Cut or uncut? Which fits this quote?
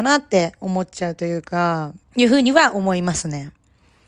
cut